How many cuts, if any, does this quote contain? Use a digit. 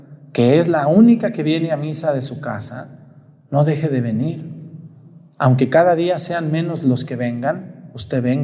0